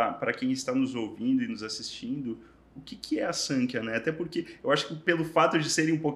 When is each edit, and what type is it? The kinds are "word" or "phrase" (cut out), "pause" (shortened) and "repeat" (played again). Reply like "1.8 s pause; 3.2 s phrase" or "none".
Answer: none